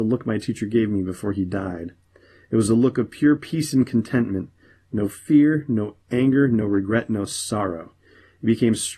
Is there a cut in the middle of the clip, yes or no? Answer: no